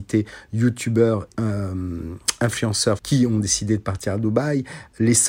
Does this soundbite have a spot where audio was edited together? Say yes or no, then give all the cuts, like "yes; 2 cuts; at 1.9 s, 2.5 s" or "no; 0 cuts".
yes; 2 cuts; at 1.3 s, 3.0 s